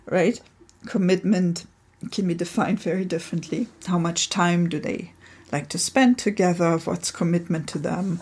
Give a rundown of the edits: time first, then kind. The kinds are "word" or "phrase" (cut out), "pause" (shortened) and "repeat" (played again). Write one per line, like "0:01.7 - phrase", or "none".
0:03.8 - pause

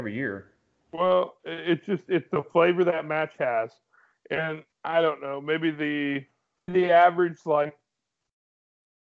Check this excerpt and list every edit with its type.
0:04.7 - pause
0:06.7 - word

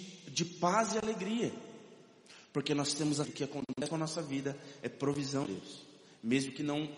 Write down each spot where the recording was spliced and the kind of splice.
0:03.2 - word
0:05.4 - word

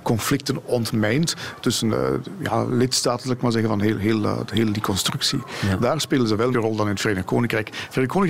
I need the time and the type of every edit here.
0:01.6 - word
0:06.5 - phrase

